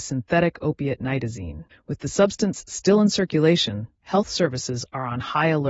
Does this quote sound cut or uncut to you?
cut